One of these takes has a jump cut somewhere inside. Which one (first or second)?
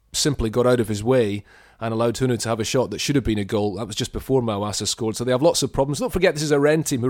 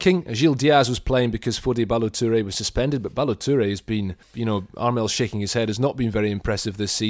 second